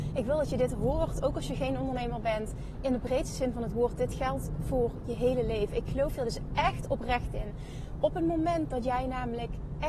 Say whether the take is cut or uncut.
uncut